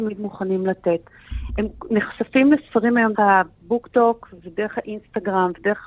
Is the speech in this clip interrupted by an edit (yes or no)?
yes